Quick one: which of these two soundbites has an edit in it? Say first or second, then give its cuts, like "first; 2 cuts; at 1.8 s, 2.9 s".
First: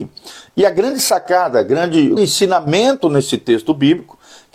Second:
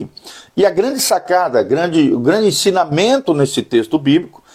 first; 1 cut; at 2.2 s